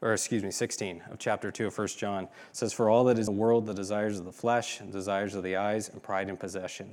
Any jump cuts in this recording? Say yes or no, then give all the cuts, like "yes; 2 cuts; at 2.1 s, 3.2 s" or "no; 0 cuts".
yes; 1 cut; at 3.3 s